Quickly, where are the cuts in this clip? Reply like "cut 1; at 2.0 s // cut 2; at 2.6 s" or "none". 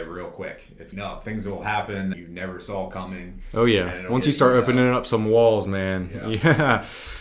cut 1; at 0.9 s // cut 2; at 2.1 s